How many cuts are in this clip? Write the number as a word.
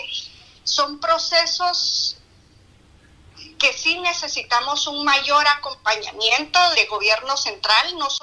one